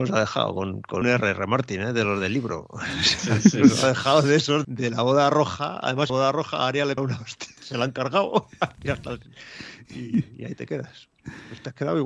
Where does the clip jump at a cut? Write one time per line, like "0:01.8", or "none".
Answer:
0:01.0
0:04.6
0:06.1
0:07.0
0:07.6